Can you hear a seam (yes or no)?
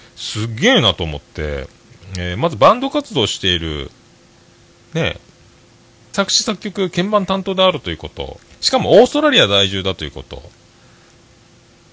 yes